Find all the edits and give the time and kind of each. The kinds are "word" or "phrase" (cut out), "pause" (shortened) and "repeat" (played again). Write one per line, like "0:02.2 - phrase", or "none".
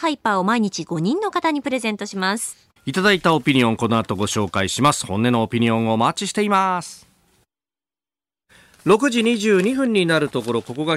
0:02.8 - pause